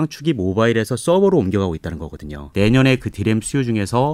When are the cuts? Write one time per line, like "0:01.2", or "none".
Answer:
none